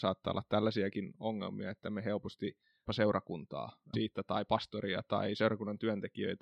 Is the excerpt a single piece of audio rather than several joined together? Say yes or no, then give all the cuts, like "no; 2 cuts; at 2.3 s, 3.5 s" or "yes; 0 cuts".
no; 2 cuts; at 2.9 s, 3.9 s